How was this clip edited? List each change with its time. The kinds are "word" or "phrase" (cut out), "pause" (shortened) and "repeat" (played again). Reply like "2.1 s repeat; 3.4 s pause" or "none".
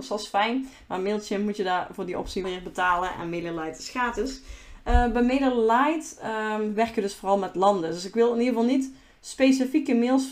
2.4 s word